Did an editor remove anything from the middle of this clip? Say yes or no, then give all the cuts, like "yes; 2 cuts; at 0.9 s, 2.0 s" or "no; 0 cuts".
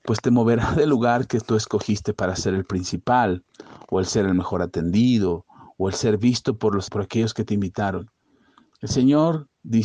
yes; 1 cut; at 6.9 s